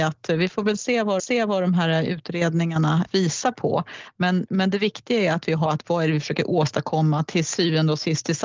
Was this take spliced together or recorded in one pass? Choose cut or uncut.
cut